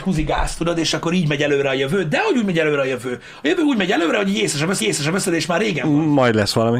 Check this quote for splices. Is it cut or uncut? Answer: cut